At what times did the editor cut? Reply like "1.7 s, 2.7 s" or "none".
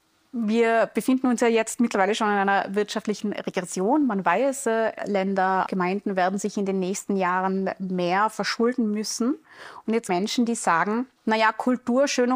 5.0 s, 5.7 s, 10.1 s, 11.2 s